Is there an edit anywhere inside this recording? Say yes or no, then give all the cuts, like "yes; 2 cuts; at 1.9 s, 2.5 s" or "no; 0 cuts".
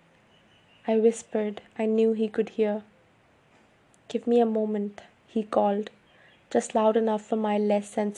no; 0 cuts